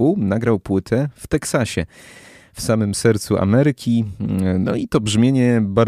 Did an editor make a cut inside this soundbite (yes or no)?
no